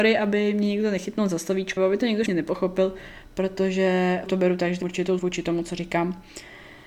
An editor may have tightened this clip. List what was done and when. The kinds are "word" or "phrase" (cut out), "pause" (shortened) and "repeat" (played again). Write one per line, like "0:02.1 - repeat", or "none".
0:01.8 - word
0:02.3 - word
0:04.3 - word
0:04.8 - word
0:05.2 - word